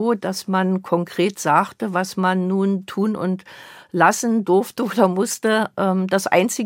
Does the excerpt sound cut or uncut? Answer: uncut